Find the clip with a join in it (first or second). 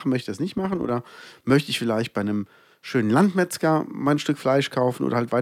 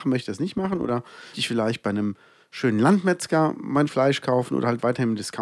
second